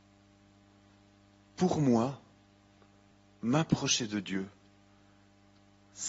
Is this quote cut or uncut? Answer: uncut